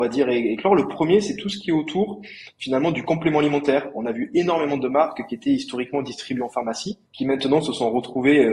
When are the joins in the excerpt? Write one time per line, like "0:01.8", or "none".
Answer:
0:07.1